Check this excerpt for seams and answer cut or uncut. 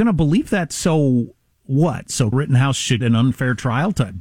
cut